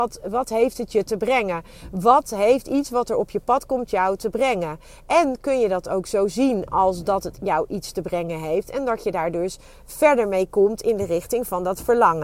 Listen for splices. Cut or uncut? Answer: uncut